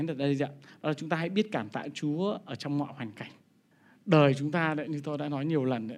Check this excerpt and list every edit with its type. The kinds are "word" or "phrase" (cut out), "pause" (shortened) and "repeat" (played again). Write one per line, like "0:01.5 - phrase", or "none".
0:03.7 - pause